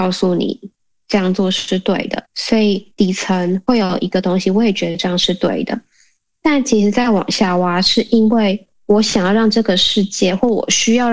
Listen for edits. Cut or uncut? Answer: cut